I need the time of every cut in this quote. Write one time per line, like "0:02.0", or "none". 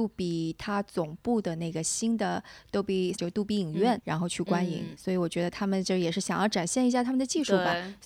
0:03.1
0:04.0
0:04.9